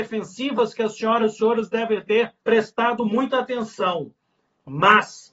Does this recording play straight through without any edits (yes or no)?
no